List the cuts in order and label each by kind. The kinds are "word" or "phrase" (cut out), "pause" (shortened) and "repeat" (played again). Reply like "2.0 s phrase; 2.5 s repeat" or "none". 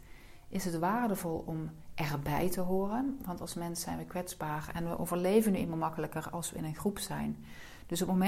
none